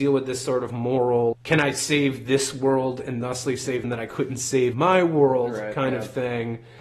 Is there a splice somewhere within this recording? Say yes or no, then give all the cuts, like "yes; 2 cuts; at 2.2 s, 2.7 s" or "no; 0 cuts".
yes; 3 cuts; at 1.3 s, 3.8 s, 4.7 s